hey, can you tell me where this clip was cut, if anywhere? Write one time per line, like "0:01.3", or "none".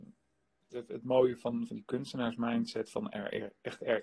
0:01.7